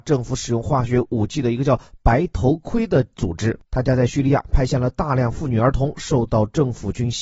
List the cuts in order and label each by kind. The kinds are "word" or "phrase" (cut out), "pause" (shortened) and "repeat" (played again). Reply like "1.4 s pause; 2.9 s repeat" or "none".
3.7 s pause